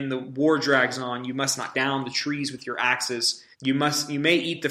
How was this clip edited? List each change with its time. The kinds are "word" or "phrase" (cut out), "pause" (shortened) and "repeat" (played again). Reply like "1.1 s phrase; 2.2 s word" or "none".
1.7 s word; 3.5 s pause